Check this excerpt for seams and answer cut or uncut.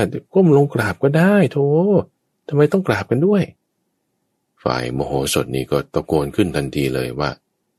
uncut